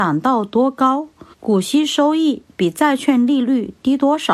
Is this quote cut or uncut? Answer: cut